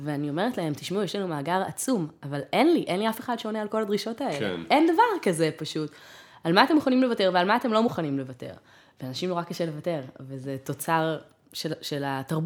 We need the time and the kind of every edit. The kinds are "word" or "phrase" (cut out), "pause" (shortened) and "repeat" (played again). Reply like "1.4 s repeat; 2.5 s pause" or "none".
none